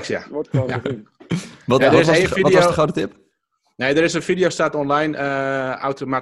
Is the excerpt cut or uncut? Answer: uncut